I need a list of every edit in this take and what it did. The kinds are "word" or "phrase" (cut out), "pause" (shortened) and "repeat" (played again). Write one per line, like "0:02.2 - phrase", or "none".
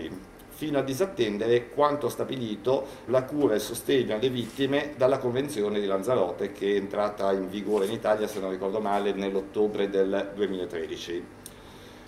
0:03.1 - word